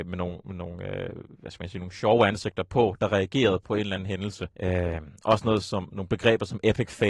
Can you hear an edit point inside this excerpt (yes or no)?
yes